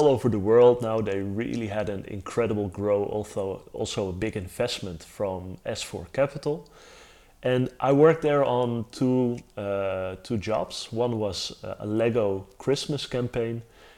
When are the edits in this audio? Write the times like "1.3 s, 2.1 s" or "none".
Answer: none